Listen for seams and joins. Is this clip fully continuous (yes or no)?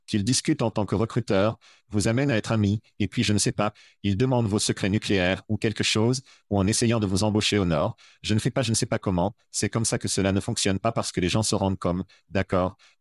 yes